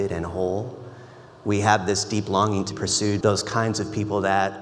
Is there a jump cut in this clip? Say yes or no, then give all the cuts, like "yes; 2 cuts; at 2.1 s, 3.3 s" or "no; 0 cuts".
yes; 2 cuts; at 2.7 s, 3.2 s